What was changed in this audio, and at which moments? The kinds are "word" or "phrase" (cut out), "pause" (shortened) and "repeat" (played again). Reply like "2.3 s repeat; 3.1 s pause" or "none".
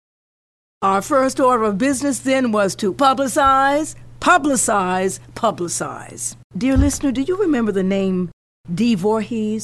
6.5 s pause